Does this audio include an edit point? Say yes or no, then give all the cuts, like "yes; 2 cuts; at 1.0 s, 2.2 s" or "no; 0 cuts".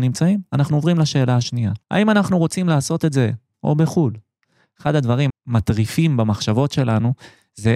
yes; 3 cuts; at 1.8 s, 3.5 s, 5.3 s